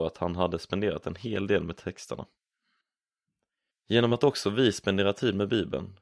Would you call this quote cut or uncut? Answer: uncut